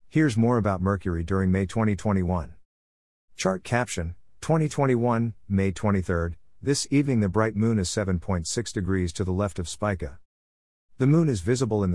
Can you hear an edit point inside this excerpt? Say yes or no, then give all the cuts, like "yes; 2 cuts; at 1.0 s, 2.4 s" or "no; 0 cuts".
no; 0 cuts